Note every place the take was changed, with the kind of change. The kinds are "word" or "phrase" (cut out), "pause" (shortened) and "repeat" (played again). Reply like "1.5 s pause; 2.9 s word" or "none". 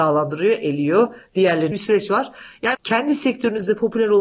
1.7 s phrase; 2.7 s word